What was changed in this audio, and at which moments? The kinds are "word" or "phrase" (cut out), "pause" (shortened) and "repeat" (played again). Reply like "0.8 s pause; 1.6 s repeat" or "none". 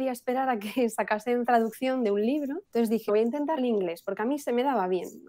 1.5 s word; 2.6 s pause; 3.1 s word; 3.6 s word